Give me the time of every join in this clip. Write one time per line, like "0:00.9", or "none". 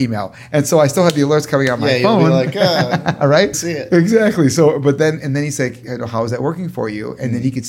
0:03.5